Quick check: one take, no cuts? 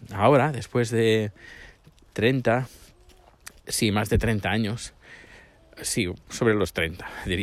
yes; 0 cuts

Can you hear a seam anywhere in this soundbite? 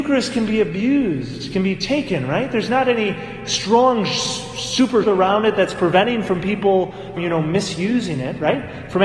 yes; 2 cuts; at 5.0 s, 7.2 s

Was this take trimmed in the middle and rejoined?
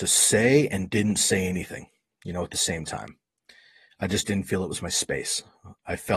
no; 0 cuts

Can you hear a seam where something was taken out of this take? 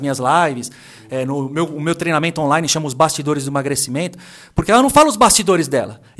no; 0 cuts

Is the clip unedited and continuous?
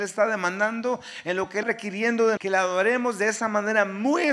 no; 2 cuts; at 1.6 s, 2.4 s

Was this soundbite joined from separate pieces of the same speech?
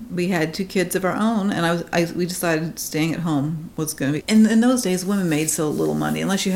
yes; 1 cut; at 4.2 s

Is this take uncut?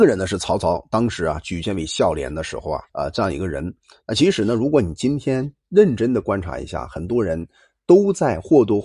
no; 1 cut; at 2.9 s

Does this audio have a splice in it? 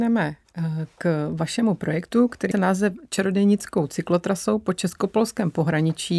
yes; 1 cut; at 2.5 s

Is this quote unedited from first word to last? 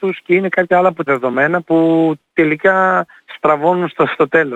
no; 1 cut; at 1.1 s

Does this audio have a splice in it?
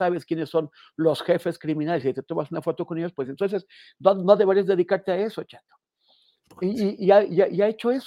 no; 0 cuts

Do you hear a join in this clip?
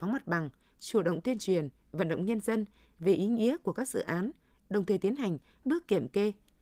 yes; 1 cut; at 5.6 s

